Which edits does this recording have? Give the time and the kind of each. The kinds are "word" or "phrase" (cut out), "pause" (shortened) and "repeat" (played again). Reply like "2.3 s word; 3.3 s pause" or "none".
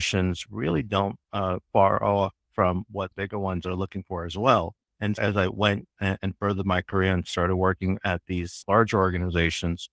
1.6 s pause; 3.1 s word; 4.9 s pause; 6.2 s word; 8.6 s word